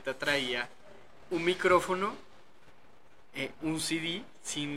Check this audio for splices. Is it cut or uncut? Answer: uncut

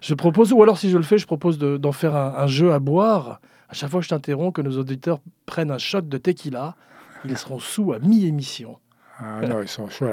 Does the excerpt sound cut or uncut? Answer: uncut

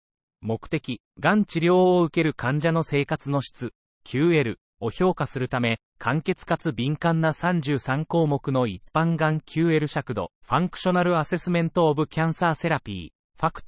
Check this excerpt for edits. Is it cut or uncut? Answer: cut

